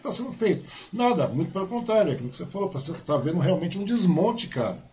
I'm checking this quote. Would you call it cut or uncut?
uncut